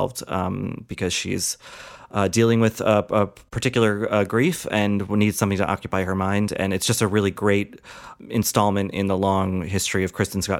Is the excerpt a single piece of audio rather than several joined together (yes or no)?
yes